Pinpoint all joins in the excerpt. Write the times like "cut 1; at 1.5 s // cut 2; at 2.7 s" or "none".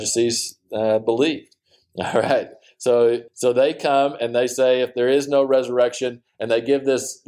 cut 1; at 3.3 s